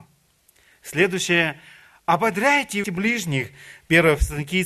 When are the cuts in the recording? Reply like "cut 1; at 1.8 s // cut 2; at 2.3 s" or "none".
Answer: cut 1; at 2.8 s